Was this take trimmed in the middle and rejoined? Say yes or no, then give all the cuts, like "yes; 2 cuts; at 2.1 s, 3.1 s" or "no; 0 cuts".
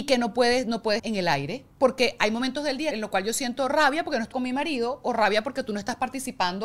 yes; 4 cuts; at 1.0 s, 1.7 s, 2.9 s, 4.3 s